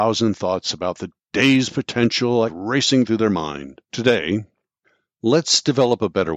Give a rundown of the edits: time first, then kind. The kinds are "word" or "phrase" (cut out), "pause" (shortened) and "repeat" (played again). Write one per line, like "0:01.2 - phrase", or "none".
0:02.5 - word
0:03.8 - pause